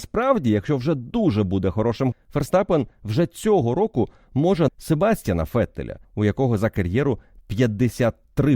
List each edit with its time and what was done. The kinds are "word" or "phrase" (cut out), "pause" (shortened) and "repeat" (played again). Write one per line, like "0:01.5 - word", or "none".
0:02.1 - word
0:04.7 - word
0:06.0 - pause